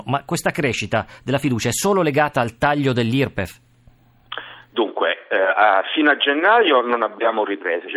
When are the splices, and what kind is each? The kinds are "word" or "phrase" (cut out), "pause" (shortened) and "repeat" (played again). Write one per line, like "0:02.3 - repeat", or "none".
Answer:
none